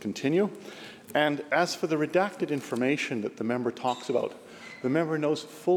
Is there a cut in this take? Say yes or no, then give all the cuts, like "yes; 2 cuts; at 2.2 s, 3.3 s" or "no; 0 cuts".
no; 0 cuts